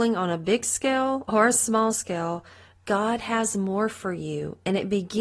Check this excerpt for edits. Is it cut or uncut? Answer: uncut